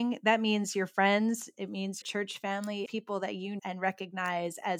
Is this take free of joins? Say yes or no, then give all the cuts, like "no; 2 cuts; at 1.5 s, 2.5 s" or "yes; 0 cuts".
no; 3 cuts; at 2.0 s, 2.9 s, 3.6 s